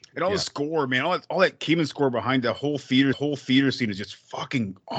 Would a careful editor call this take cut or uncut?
cut